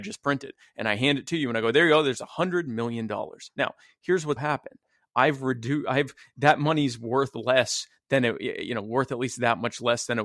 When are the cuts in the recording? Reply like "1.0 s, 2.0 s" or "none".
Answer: 4.4 s

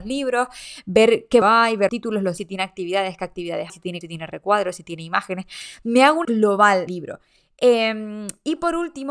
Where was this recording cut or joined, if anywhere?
1.4 s, 1.9 s, 2.4 s, 3.7 s, 4.0 s, 6.2 s, 6.9 s

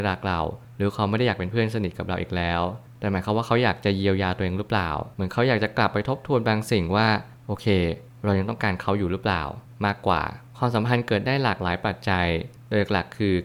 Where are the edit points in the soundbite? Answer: none

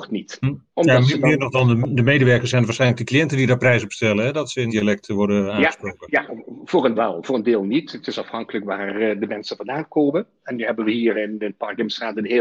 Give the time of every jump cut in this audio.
4.7 s, 6.9 s, 11.1 s

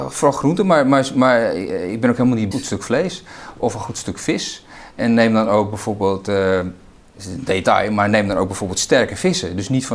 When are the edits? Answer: 2.5 s

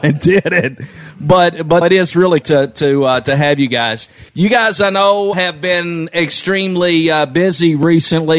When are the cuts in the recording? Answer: 1.8 s, 2.4 s, 4.3 s, 5.3 s

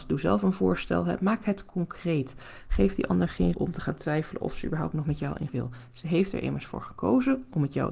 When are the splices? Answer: 3.5 s, 5.5 s

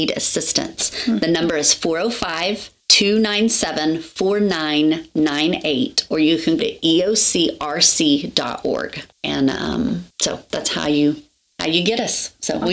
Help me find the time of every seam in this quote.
2.8 s, 6.6 s, 9.1 s, 10.1 s

